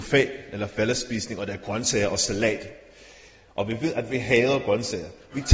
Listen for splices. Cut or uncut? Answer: uncut